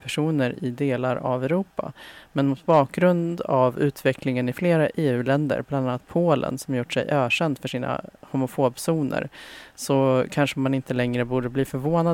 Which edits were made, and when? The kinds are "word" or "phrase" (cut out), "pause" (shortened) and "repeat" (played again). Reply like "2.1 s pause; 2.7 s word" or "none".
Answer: none